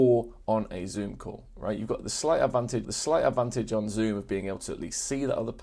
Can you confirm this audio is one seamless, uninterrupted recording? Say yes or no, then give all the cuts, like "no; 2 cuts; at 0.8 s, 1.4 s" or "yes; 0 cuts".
no; 1 cut; at 2.8 s